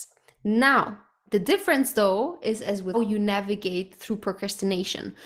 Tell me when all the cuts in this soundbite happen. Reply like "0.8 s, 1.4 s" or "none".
2.9 s